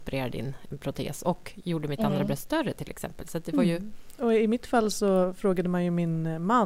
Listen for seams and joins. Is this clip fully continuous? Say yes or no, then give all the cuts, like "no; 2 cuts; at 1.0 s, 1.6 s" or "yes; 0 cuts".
yes; 0 cuts